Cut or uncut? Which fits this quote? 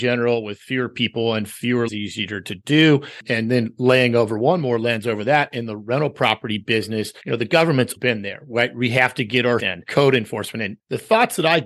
cut